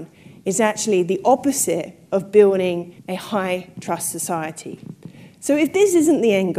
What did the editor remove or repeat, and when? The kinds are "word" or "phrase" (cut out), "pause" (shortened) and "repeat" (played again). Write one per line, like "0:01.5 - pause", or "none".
0:03.0 - pause